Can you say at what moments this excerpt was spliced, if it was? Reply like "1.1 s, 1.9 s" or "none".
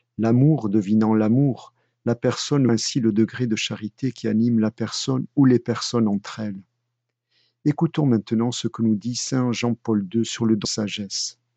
2.7 s, 10.6 s